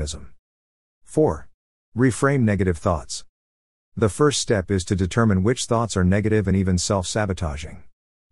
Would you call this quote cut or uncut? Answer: uncut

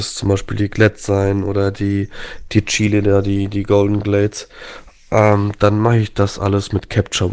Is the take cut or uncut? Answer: uncut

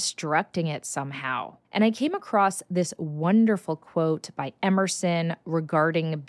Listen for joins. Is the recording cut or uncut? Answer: cut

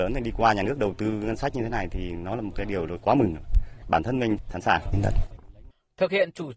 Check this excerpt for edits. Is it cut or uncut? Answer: uncut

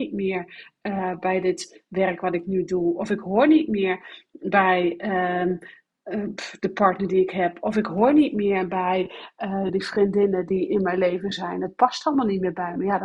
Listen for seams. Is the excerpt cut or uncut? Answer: uncut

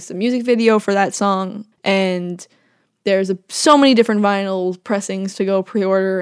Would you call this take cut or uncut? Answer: cut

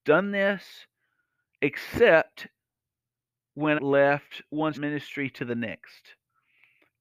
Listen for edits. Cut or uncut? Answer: cut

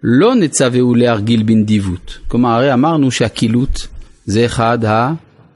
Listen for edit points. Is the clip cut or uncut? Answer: uncut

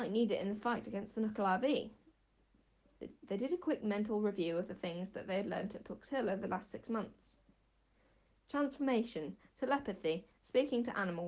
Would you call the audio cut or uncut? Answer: uncut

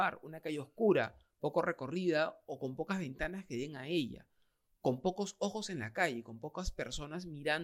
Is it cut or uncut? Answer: uncut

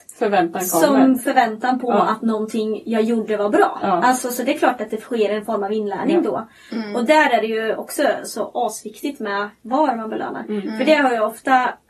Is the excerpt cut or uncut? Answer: uncut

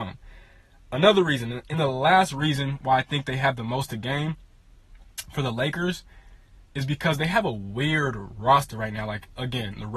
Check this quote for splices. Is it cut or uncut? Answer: uncut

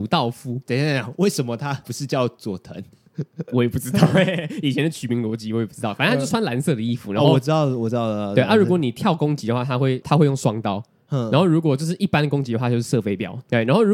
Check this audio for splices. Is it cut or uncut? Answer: uncut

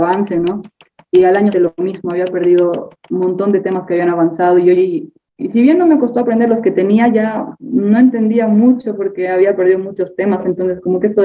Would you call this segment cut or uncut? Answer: cut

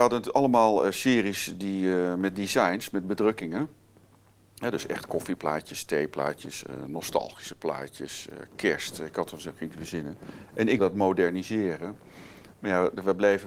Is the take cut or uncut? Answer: cut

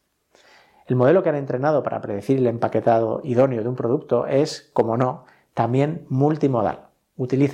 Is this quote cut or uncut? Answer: uncut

